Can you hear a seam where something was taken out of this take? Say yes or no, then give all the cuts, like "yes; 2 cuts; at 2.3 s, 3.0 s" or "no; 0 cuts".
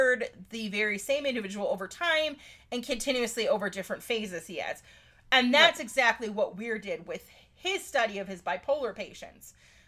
no; 0 cuts